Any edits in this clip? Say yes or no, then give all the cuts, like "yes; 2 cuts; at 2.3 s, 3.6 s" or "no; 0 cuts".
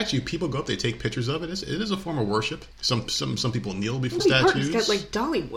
yes; 3 cuts; at 2.7 s, 3.4 s, 4.2 s